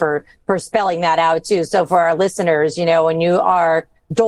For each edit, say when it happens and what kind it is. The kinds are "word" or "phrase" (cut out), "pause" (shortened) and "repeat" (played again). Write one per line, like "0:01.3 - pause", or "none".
none